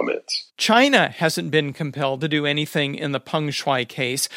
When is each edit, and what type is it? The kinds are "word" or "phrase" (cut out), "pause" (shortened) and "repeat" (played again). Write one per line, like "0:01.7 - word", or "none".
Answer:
none